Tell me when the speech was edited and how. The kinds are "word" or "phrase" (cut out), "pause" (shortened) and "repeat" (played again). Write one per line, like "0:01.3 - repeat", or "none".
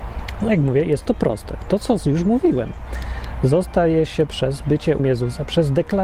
0:01.0 - phrase
0:05.0 - word